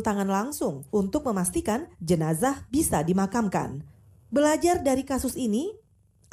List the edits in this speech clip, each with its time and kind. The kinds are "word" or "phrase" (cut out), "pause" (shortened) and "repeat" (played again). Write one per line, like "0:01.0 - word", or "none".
none